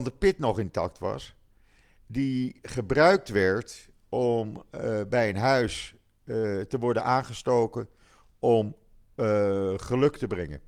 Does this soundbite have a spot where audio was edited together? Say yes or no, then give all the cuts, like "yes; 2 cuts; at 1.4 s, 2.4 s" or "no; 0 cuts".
no; 0 cuts